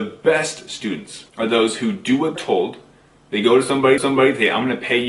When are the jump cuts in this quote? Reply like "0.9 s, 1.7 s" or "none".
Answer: 1.3 s, 2.4 s, 4.0 s